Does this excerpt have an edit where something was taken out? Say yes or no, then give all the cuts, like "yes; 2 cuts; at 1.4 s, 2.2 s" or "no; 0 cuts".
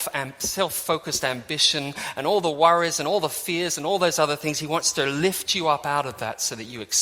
no; 0 cuts